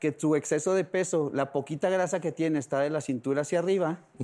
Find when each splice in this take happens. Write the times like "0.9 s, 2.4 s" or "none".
none